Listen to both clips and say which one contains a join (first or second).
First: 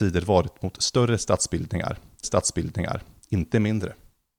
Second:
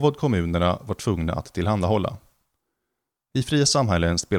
first